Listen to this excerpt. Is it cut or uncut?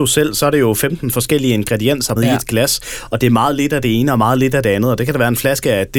cut